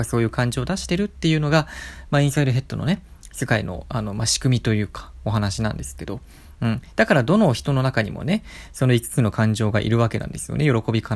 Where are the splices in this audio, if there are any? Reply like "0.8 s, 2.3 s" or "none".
none